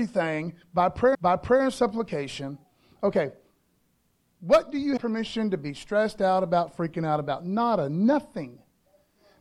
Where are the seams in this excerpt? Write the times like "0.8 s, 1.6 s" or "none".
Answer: 1.1 s, 5.0 s